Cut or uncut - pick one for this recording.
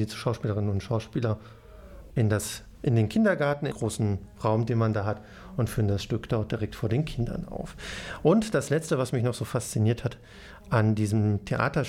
cut